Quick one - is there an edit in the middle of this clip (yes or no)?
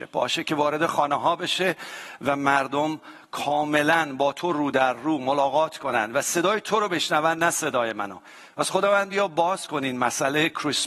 no